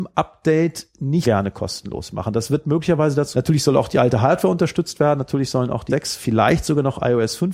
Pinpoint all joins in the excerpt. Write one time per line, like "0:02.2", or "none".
0:01.2
0:03.3
0:05.9